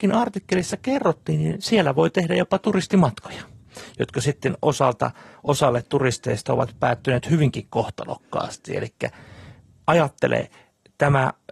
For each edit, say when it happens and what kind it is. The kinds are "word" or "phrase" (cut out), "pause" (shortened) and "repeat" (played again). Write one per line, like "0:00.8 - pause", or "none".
none